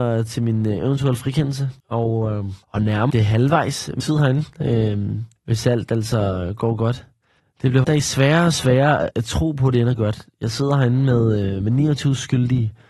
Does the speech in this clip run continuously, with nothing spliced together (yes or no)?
no